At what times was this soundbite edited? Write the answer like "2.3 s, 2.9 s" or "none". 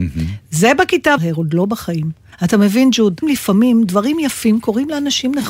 1.2 s, 2.3 s, 3.2 s